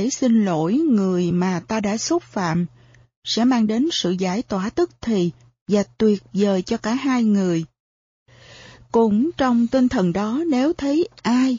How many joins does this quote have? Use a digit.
0